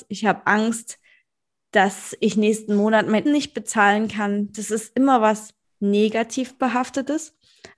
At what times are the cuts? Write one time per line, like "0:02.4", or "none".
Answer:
0:03.3